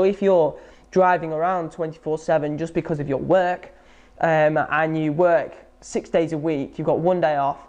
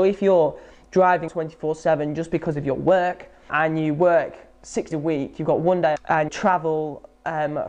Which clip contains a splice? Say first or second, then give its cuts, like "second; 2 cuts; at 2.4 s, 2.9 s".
second; 5 cuts; at 1.3 s, 3.5 s, 4.9 s, 6.0 s, 6.3 s